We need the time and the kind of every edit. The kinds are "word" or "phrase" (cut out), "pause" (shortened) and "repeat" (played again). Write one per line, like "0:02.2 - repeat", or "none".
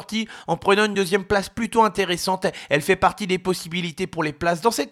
none